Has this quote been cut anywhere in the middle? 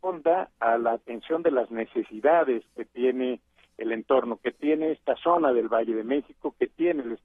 no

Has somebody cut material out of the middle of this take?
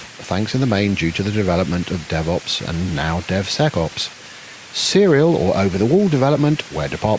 no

